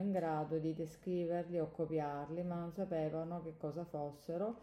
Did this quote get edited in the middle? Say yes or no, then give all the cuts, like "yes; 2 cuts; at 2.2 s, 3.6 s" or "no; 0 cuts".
no; 0 cuts